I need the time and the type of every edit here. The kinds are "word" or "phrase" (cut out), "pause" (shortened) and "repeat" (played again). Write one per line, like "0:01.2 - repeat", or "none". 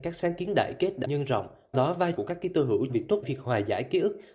0:01.0 - word
0:01.7 - word
0:02.2 - word
0:02.9 - word
0:03.2 - word

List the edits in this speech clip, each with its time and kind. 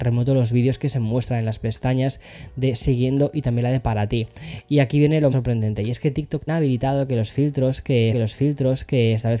0:05.3 - word
0:06.5 - word
0:08.1 - repeat

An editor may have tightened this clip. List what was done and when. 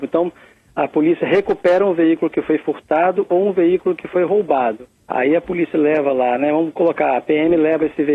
0:05.0 - pause

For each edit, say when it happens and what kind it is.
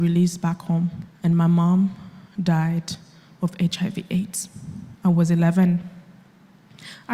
0:01.2 - pause
0:04.9 - pause

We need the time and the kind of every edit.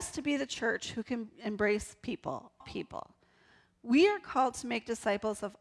0:02.6 - word

